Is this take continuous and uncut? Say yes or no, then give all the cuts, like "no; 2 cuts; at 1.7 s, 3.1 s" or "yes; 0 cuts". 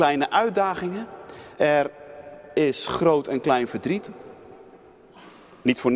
no; 1 cut; at 1.5 s